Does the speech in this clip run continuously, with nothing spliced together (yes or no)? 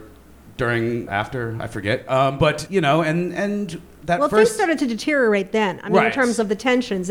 no